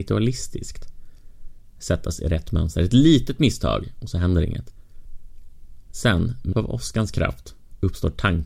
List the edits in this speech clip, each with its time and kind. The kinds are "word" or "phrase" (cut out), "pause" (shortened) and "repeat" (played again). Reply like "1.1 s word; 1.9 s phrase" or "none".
6.5 s word

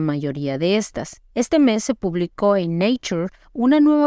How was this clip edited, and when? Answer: 1.3 s pause

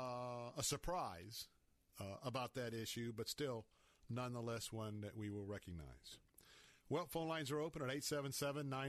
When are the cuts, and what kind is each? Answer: none

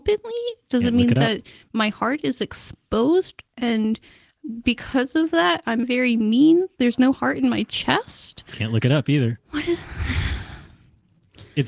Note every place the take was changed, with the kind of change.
5.8 s word

